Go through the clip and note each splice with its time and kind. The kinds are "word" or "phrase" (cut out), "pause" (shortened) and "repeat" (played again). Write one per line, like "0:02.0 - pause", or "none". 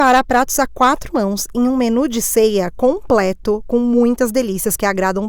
none